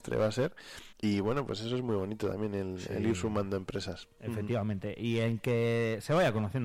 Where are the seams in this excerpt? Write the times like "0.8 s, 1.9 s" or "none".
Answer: 0.9 s, 4.1 s